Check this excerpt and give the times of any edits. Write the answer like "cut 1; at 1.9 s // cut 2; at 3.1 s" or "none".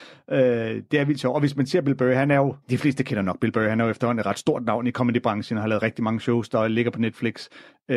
cut 1; at 2.6 s